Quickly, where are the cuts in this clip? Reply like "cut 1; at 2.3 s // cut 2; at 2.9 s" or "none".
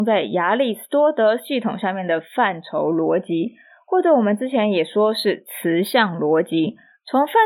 none